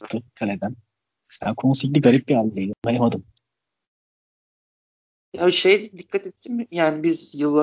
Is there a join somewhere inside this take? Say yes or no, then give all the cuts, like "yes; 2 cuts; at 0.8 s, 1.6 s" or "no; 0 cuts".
yes; 1 cut; at 2.8 s